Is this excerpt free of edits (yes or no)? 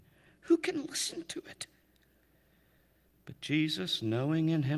yes